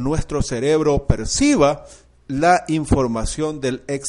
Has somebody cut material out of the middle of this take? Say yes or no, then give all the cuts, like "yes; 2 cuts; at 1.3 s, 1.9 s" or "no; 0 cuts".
no; 0 cuts